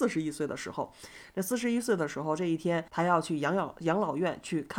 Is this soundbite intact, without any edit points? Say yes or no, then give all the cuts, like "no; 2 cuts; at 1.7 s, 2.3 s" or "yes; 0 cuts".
no; 1 cut; at 2.9 s